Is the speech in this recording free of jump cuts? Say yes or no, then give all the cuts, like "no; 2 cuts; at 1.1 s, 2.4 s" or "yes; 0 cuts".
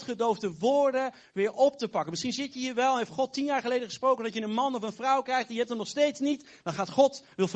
yes; 0 cuts